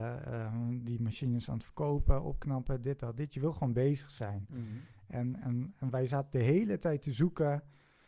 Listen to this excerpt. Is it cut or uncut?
uncut